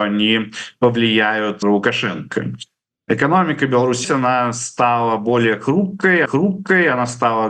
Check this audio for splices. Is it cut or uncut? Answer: cut